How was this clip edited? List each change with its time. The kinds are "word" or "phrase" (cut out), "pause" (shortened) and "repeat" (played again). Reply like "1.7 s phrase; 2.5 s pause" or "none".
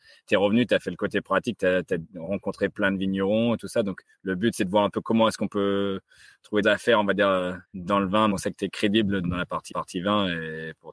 6.6 s phrase; 7.6 s pause; 8.3 s phrase; 9.2 s word; 9.7 s repeat